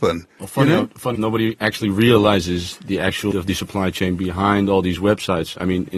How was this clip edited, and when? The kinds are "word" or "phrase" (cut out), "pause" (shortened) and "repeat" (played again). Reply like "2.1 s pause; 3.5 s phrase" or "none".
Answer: 1.1 s word; 3.3 s word